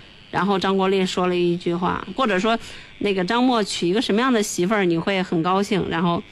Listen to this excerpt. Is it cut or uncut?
cut